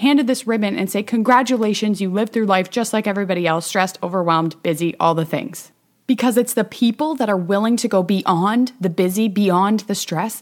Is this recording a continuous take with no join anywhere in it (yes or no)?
yes